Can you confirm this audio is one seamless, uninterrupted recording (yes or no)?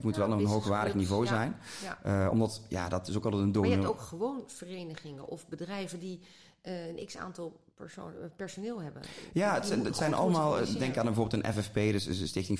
yes